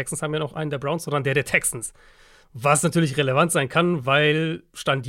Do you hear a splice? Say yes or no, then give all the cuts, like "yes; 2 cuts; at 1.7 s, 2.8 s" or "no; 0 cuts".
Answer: no; 0 cuts